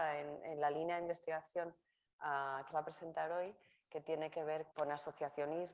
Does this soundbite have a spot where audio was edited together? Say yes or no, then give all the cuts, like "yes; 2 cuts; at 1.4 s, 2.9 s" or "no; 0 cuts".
yes; 2 cuts; at 2.7 s, 4.7 s